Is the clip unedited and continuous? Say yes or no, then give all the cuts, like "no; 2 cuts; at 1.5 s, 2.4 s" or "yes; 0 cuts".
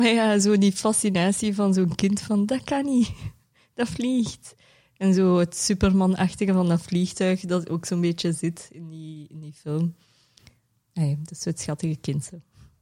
yes; 0 cuts